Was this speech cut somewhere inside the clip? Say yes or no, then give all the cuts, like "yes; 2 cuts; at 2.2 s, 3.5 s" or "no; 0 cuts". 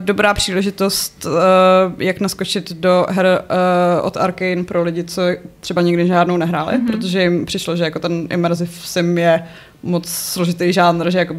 no; 0 cuts